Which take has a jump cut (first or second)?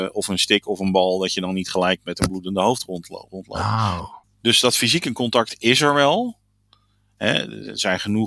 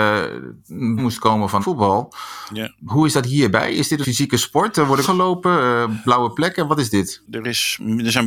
second